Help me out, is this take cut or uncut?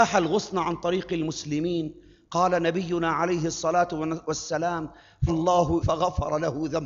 cut